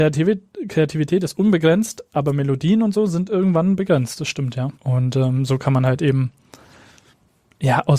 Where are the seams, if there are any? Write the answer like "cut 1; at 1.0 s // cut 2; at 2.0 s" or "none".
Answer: cut 1; at 4.7 s